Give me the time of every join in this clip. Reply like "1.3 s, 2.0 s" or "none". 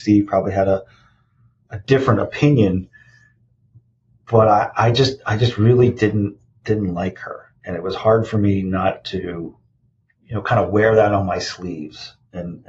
none